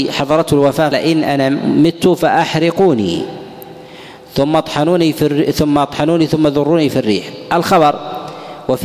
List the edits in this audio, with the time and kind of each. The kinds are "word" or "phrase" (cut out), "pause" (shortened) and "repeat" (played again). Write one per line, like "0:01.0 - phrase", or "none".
0:00.9 - word